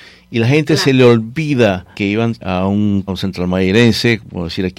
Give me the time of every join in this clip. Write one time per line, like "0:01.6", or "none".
0:01.9
0:02.4
0:03.1